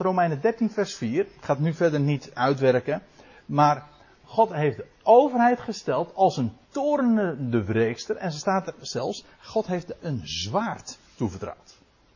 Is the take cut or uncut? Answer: cut